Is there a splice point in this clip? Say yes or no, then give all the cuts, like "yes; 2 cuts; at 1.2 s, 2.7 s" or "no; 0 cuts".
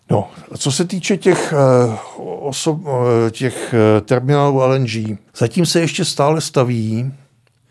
yes; 1 cut; at 5.3 s